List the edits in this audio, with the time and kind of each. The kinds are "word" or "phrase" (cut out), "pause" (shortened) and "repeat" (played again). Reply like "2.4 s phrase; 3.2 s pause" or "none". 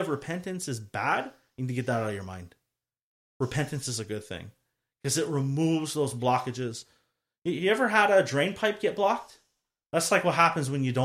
none

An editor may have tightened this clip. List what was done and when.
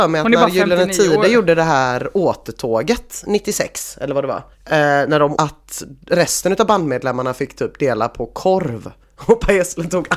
4.5 s pause; 5.3 s word

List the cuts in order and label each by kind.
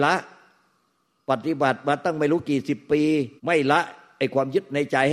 3.4 s pause

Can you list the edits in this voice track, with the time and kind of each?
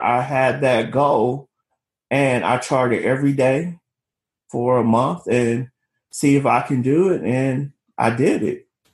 none

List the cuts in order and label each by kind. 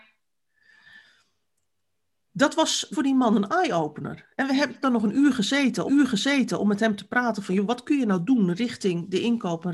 2.9 s word; 4.8 s word; 5.9 s repeat

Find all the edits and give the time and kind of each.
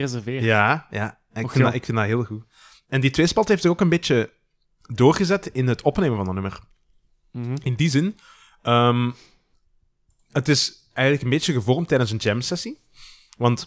none

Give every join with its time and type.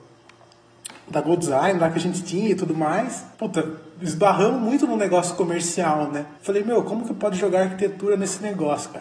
3.3 s pause; 6.4 s pause

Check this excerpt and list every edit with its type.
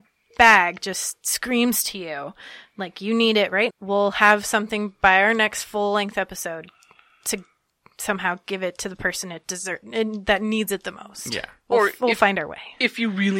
3.7 s word

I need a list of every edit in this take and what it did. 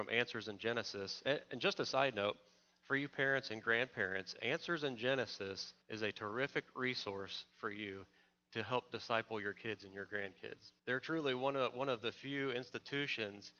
5.8 s pause; 10.8 s pause

